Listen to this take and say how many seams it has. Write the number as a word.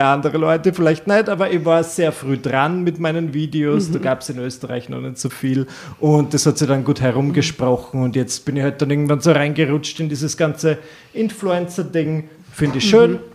zero